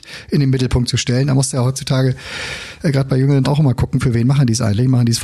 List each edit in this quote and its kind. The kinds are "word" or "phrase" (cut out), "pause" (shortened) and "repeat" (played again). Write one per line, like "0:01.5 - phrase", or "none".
0:03.4 - word